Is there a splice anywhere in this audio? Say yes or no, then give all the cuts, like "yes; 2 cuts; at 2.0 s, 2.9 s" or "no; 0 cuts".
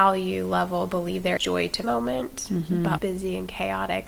yes; 3 cuts; at 1.4 s, 1.8 s, 3.0 s